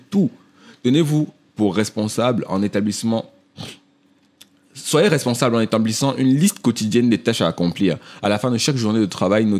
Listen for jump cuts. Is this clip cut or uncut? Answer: uncut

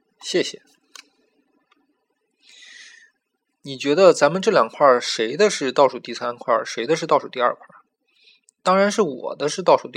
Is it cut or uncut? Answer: cut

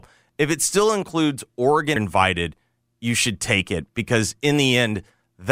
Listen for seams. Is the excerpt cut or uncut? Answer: cut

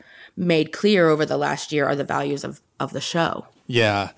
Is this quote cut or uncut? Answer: uncut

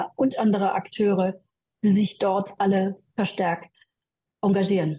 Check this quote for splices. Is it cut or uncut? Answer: uncut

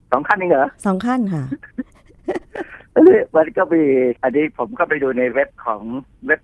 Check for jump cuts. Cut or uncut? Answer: cut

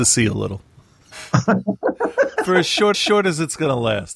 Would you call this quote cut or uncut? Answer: cut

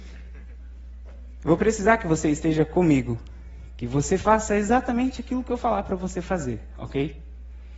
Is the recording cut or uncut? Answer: uncut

